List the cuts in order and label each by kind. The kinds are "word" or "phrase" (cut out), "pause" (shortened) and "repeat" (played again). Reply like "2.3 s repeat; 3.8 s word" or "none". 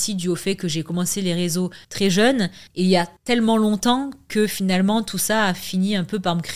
1.8 s pause; 2.7 s pause; 3.2 s pause